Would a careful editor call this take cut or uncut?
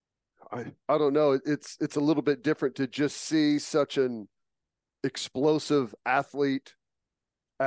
uncut